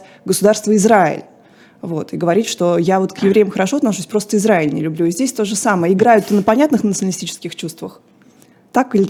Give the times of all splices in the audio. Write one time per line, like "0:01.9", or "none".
none